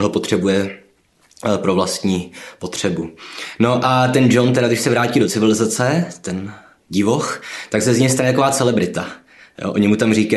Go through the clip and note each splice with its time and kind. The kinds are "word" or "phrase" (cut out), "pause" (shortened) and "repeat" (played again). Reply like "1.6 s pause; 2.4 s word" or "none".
none